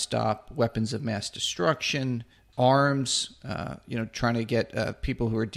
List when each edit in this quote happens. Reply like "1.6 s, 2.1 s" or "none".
2.5 s